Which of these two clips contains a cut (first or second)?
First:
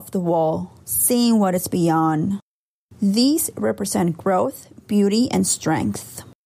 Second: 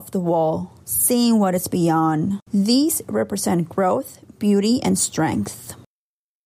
second